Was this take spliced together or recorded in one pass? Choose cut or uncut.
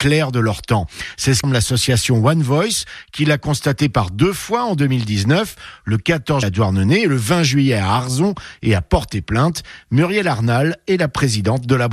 cut